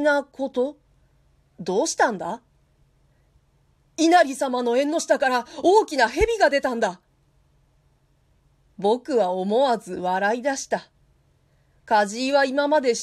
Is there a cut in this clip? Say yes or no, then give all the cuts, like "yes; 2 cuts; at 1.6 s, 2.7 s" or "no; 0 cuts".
no; 0 cuts